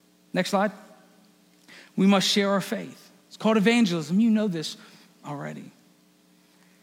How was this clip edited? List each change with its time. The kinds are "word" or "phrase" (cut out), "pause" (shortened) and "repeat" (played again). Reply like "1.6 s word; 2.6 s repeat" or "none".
none